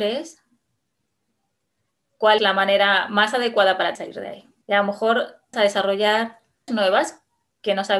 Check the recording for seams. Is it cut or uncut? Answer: cut